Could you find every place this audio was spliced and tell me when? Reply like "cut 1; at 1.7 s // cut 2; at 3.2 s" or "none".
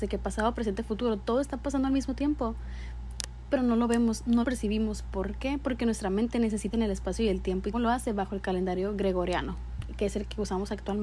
cut 1; at 4.4 s // cut 2; at 6.7 s // cut 3; at 7.7 s